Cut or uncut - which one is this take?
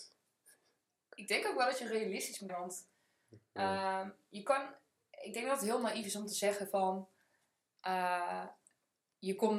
cut